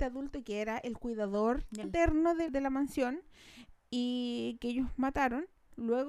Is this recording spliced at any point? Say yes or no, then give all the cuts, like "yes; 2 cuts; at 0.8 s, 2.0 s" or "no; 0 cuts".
yes; 2 cuts; at 1.8 s, 2.5 s